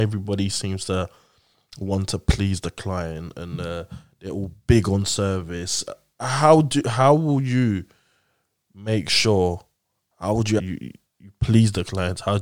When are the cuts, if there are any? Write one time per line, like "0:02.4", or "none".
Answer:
0:10.6